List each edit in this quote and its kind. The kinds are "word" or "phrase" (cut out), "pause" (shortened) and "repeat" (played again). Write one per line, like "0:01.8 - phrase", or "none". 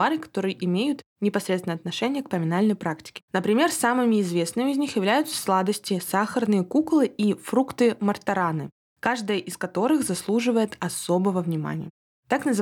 0:03.2 - pause